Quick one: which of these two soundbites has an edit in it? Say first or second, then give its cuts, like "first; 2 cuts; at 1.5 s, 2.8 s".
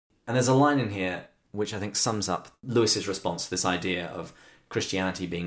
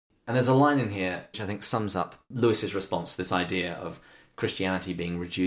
second; 1 cut; at 1.3 s